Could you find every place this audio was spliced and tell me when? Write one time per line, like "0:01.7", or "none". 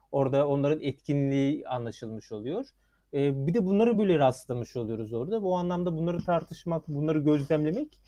none